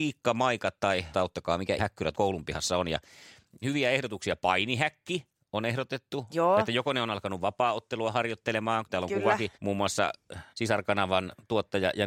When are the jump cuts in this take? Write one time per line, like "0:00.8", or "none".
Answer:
0:01.1
0:01.8
0:02.1
0:03.6
0:09.5
0:10.5